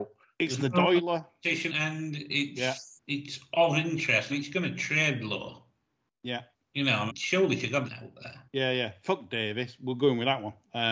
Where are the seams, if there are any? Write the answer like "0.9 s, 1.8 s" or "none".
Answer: 1.7 s, 3.0 s, 4.3 s, 6.5 s, 7.1 s, 7.9 s, 8.5 s